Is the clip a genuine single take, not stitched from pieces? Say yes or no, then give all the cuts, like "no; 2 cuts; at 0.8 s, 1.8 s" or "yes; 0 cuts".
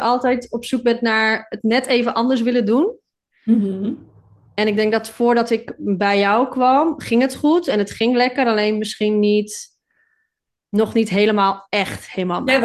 yes; 0 cuts